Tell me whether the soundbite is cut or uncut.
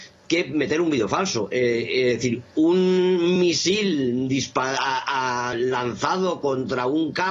uncut